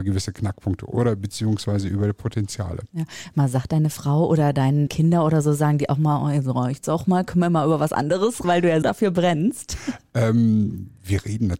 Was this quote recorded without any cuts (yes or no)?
no